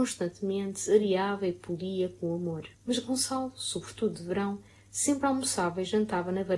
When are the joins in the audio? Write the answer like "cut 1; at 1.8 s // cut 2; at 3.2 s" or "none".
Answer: cut 1; at 2.7 s